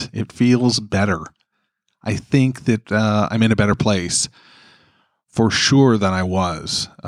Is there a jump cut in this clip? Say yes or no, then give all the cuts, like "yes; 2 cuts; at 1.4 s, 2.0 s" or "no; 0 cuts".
no; 0 cuts